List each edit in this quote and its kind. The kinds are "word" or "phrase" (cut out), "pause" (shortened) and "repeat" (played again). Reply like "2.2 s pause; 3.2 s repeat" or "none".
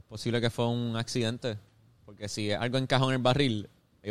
none